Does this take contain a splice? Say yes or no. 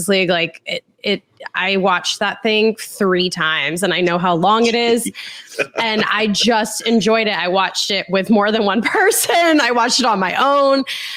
no